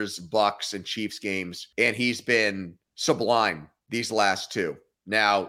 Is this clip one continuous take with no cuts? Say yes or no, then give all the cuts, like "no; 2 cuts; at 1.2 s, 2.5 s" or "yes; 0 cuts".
no; 2 cuts; at 1.7 s, 2.9 s